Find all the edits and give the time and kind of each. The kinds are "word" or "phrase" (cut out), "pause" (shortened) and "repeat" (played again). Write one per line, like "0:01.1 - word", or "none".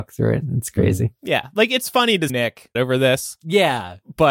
0:02.3 - word
0:02.7 - word